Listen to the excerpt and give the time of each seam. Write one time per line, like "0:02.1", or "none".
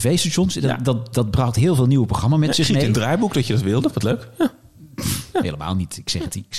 none